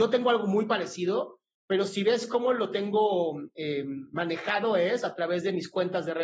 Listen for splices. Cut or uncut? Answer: uncut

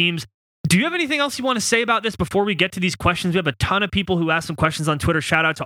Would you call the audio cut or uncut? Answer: uncut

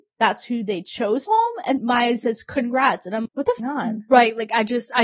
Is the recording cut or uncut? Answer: cut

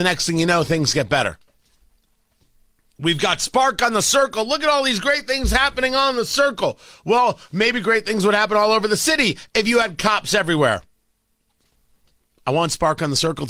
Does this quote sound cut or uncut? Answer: uncut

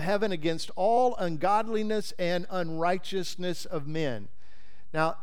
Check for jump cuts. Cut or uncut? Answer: uncut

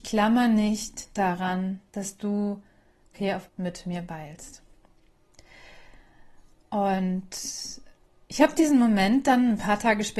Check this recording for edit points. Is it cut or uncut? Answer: cut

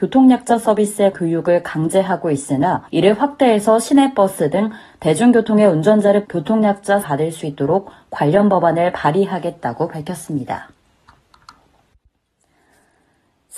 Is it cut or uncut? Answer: cut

